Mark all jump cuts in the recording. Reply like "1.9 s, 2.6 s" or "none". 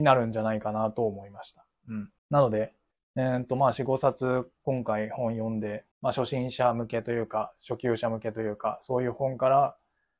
2.2 s, 2.9 s, 5.9 s